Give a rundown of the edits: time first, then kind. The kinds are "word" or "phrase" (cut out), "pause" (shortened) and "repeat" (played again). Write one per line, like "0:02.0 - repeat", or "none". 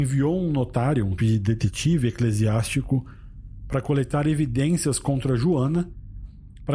0:01.2 - word